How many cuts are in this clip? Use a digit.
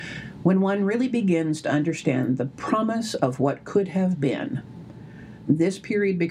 0